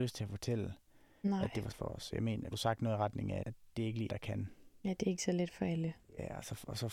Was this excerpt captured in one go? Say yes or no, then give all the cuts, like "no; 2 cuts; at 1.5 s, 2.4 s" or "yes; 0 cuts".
no; 5 cuts; at 1.7 s, 2.5 s, 3.4 s, 4.1 s, 5.2 s